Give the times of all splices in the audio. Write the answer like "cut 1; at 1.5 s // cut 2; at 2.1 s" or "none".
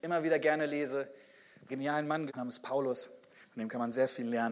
cut 1; at 1.7 s // cut 2; at 2.3 s